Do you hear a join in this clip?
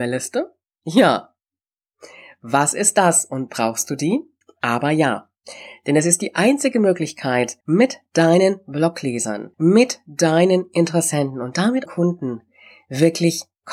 yes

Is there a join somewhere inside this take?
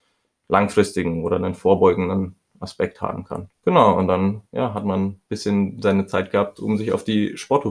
yes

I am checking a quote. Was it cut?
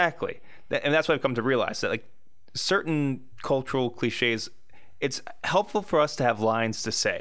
no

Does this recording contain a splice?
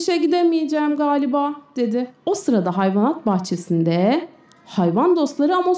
no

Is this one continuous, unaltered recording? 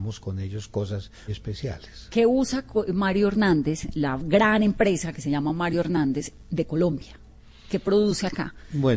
no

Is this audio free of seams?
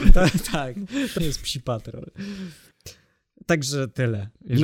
no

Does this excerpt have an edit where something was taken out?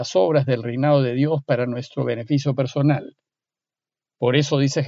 no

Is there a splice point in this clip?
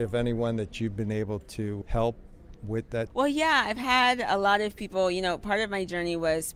yes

